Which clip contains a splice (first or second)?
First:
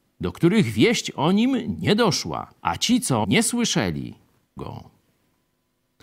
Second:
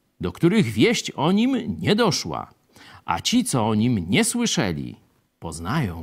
first